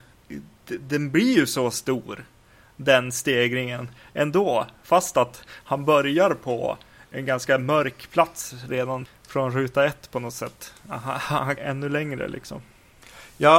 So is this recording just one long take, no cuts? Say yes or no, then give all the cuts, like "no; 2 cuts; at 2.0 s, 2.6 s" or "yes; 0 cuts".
no; 2 cuts; at 9.1 s, 11.6 s